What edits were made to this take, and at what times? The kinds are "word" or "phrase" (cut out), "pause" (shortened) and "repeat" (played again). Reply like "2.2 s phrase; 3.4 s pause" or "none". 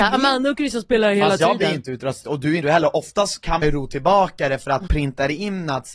2.2 s word; 2.6 s word; 3.6 s word; 4.9 s word